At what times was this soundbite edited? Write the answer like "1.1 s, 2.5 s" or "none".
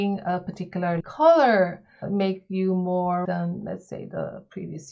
1.0 s, 2.0 s, 3.2 s